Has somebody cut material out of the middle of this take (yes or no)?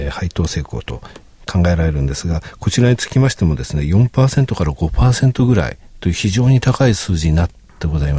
no